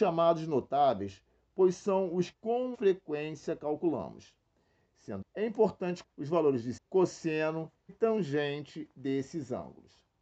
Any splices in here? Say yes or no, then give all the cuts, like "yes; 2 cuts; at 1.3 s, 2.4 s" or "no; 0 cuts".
yes; 6 cuts; at 2.3 s, 2.7 s, 5.2 s, 6.0 s, 6.8 s, 7.9 s